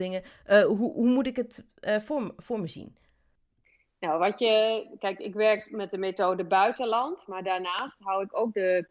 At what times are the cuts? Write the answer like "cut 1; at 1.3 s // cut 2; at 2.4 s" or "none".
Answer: none